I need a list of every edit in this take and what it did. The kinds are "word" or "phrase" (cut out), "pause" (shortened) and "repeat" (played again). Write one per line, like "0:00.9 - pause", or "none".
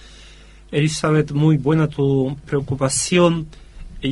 none